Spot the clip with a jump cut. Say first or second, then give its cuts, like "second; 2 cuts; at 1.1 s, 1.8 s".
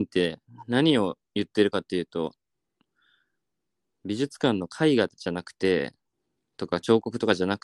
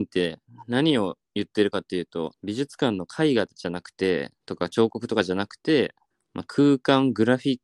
second; 3 cuts; at 2.3 s, 4.4 s, 6.1 s